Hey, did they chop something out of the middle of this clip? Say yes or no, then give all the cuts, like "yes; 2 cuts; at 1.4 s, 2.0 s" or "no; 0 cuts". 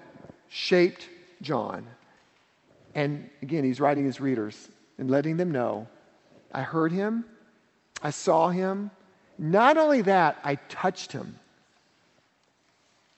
no; 0 cuts